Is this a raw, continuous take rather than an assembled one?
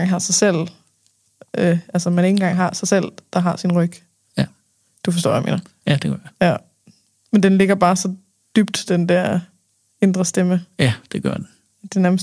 yes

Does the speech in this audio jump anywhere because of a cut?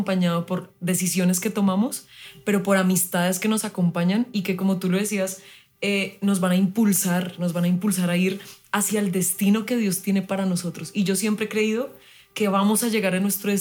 no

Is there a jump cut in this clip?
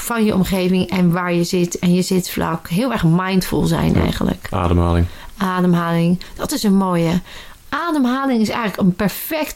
no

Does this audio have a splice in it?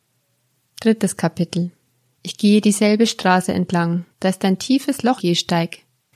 yes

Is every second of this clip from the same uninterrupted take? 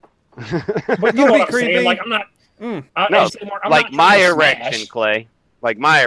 no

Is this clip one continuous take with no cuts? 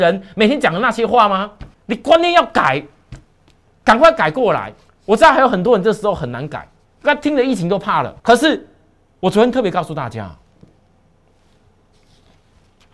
no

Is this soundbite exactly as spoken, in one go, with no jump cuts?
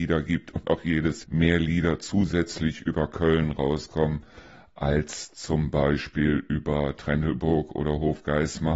no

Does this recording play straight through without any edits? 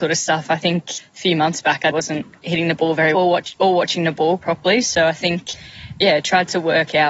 no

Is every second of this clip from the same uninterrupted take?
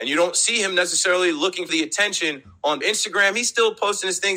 no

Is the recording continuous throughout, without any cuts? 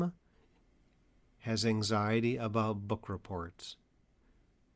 yes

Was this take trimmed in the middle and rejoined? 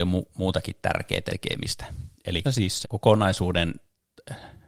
yes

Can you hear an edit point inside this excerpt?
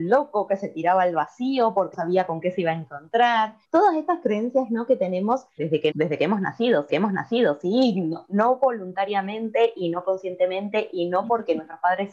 yes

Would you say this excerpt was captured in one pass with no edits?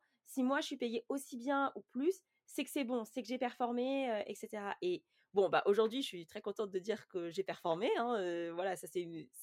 yes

